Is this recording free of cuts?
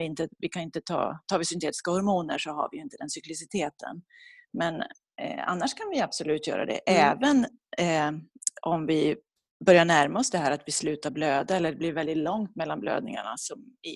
yes; 0 cuts

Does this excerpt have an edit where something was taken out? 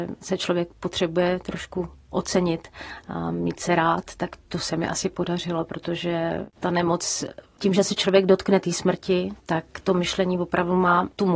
no; 0 cuts

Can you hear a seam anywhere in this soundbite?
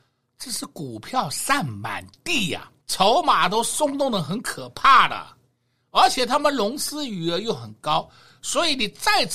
yes; 1 cut; at 2.8 s

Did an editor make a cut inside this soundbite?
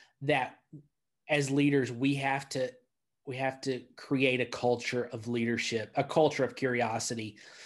no; 0 cuts

